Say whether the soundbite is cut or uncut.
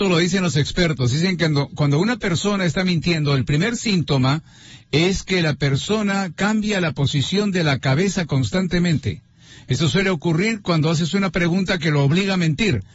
uncut